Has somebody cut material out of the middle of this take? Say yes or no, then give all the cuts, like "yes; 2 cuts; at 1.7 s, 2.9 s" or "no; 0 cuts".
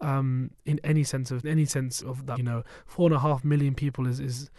yes; 3 cuts; at 1.4 s, 2.0 s, 2.4 s